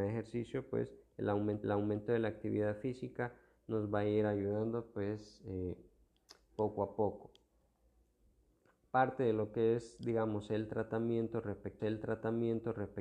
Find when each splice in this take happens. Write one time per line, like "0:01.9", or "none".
0:01.6
0:11.8